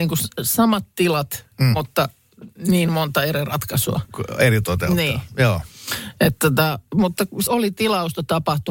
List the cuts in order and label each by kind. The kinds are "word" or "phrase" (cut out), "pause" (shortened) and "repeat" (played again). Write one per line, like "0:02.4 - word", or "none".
0:04.6 - word
0:07.5 - phrase